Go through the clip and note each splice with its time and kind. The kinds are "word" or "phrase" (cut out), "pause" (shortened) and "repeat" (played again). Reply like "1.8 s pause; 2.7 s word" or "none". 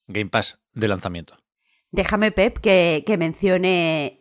none